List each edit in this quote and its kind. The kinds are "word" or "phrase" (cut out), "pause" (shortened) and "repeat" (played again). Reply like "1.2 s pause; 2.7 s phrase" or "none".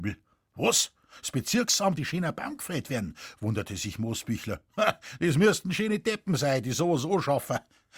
2.0 s phrase